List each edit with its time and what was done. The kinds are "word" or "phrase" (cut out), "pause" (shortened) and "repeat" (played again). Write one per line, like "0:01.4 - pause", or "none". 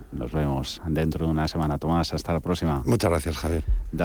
none